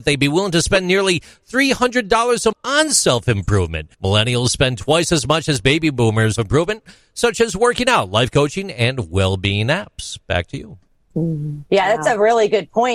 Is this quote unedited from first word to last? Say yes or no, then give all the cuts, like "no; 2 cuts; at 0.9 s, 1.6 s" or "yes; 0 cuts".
no; 3 cuts; at 2.5 s, 3.9 s, 6.4 s